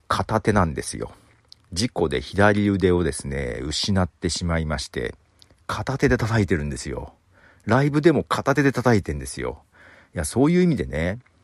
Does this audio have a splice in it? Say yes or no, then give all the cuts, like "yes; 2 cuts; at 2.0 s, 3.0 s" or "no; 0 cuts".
no; 0 cuts